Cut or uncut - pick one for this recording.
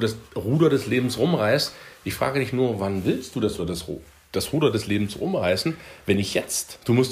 cut